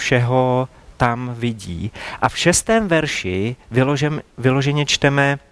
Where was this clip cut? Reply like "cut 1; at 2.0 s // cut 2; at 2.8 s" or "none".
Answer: none